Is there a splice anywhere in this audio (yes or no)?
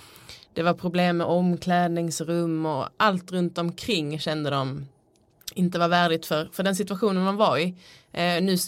no